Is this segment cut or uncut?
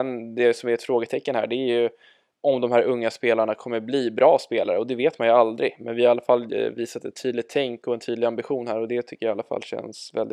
uncut